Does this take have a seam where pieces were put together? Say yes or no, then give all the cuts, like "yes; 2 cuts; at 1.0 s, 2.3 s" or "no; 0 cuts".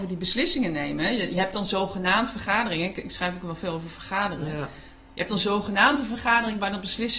no; 0 cuts